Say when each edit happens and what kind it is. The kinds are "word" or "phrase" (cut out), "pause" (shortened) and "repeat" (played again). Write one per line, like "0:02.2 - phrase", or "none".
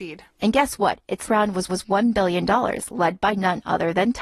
0:01.3 - word
0:01.7 - repeat